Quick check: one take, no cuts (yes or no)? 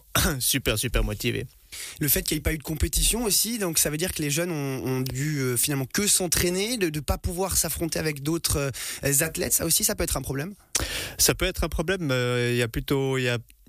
yes